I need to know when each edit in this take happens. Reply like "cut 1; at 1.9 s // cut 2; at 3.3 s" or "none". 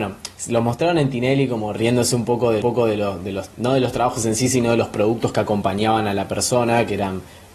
cut 1; at 2.6 s // cut 2; at 3.5 s